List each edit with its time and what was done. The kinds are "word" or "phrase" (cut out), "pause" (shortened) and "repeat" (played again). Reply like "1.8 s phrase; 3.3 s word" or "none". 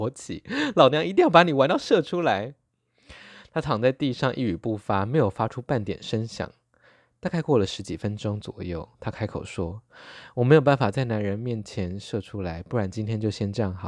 none

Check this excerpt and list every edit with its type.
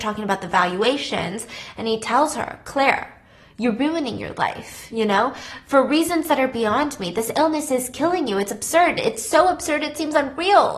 none

